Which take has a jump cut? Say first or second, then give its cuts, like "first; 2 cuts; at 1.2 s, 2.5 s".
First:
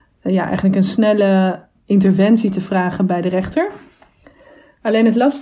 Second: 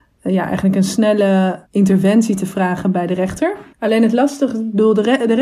second; 2 cuts; at 1.7 s, 3.7 s